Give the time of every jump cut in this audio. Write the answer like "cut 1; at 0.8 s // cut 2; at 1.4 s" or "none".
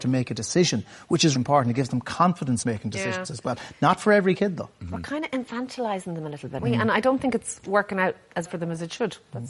cut 1; at 1.4 s // cut 2; at 2.6 s // cut 3; at 6.6 s // cut 4; at 8.5 s